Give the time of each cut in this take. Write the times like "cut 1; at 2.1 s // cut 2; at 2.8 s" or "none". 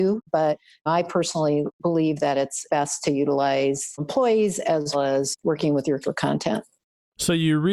cut 1; at 4.9 s // cut 2; at 6.0 s